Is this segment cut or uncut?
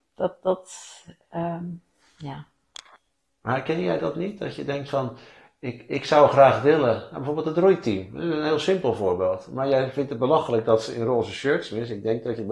uncut